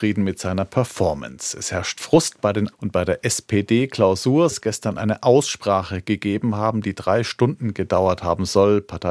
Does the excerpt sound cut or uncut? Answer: cut